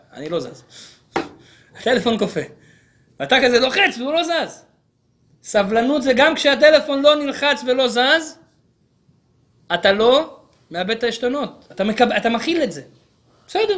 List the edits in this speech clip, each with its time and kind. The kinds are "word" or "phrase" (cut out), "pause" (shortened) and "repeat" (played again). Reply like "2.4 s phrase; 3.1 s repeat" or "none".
none